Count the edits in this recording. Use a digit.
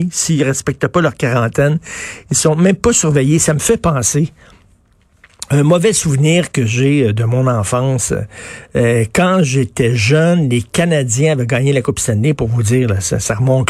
0